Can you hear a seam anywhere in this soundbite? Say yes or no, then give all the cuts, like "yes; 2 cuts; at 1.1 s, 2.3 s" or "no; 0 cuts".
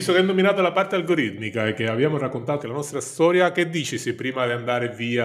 yes; 1 cut; at 2.6 s